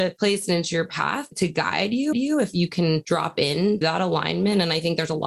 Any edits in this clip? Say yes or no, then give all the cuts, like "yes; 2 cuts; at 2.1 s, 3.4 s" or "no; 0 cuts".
yes; 2 cuts; at 2.1 s, 3.8 s